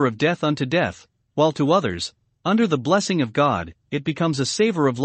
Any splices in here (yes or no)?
no